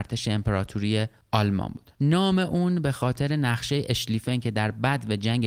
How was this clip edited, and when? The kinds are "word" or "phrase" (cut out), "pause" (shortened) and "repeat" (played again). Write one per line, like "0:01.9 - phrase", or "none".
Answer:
0:01.2 - pause
0:01.9 - pause